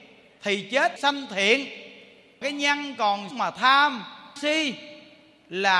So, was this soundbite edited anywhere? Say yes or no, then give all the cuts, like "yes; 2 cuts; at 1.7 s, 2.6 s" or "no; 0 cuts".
yes; 4 cuts; at 1.0 s, 2.4 s, 3.3 s, 4.4 s